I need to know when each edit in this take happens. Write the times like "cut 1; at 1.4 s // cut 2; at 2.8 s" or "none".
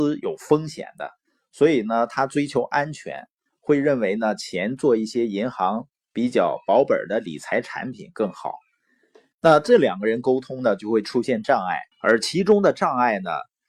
cut 1; at 11.9 s